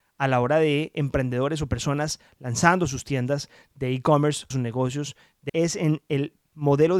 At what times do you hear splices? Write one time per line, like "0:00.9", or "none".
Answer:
0:04.5
0:05.5